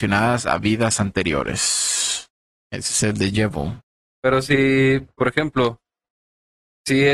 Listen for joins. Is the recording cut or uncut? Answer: uncut